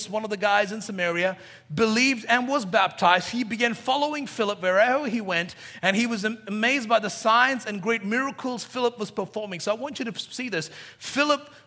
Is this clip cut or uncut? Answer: uncut